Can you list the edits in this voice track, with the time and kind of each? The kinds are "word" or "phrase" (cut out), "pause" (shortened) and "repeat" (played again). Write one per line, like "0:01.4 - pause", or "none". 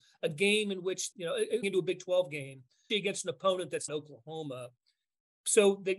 0:01.1 - word
0:01.6 - word
0:02.9 - word
0:03.9 - word